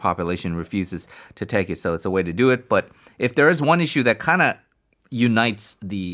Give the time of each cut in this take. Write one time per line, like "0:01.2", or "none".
none